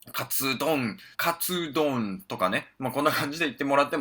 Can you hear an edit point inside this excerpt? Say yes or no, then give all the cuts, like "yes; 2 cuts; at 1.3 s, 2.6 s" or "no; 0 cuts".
yes; 1 cut; at 1.1 s